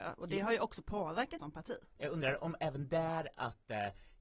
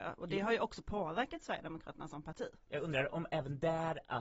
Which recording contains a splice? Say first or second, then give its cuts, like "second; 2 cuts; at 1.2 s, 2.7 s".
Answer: first; 1 cut; at 1.4 s